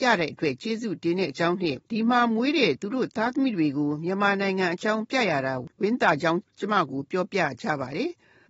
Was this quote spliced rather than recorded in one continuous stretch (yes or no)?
yes